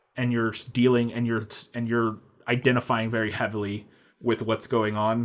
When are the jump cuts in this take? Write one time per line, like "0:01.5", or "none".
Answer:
none